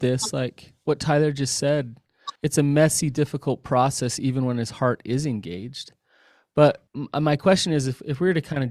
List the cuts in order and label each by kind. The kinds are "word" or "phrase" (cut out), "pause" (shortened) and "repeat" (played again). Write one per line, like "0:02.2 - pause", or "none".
0:02.4 - pause
0:06.9 - pause